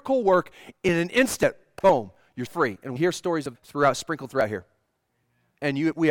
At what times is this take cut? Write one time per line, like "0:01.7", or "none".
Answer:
0:02.5
0:03.0
0:03.5